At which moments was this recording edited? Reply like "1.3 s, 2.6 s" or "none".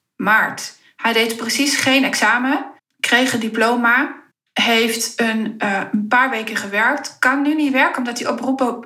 2.8 s, 4.3 s